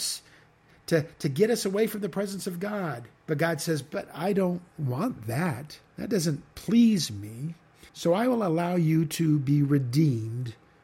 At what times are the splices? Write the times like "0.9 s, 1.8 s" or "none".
3.1 s, 4.7 s, 5.9 s, 7.9 s